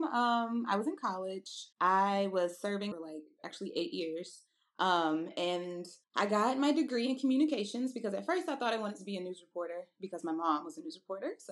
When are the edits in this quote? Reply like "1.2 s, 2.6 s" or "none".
1.7 s, 2.9 s, 6.0 s